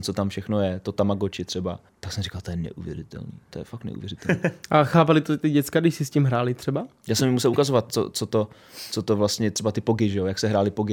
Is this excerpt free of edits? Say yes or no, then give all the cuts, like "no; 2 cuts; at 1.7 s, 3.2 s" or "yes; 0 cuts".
no; 1 cut; at 1.9 s